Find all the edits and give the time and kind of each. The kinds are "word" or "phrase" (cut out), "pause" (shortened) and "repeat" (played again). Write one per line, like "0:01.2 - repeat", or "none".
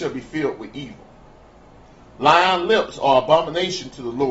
none